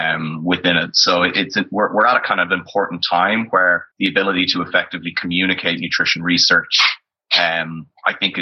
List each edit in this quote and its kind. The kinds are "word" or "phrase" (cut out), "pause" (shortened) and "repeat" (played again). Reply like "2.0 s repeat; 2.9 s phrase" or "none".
3.9 s pause